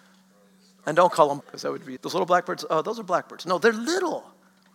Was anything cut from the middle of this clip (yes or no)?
yes